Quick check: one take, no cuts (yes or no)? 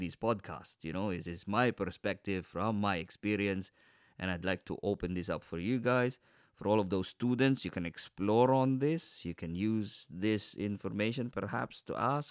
yes